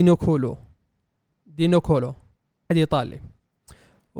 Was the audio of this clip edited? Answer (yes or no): yes